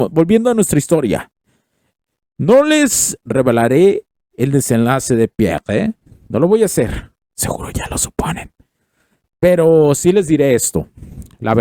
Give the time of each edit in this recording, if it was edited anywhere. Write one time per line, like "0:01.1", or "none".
none